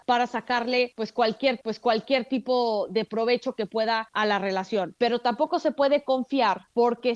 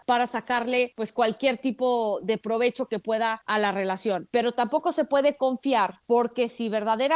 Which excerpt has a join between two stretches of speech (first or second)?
first